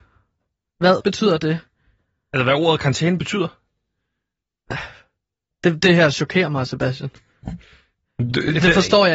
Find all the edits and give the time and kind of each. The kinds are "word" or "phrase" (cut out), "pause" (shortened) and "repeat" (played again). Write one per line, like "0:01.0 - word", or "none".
0:01.0 - word